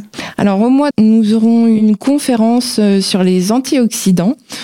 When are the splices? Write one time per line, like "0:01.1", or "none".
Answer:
0:00.9